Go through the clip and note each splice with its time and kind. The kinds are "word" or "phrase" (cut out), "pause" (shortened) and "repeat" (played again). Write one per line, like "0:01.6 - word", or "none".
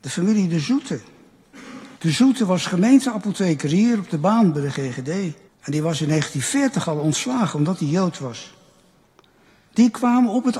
0:02.0 - pause
0:05.5 - pause